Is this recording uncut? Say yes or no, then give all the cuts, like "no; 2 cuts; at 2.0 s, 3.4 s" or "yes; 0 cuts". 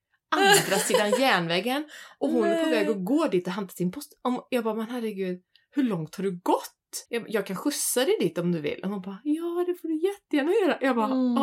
no; 1 cut; at 7.1 s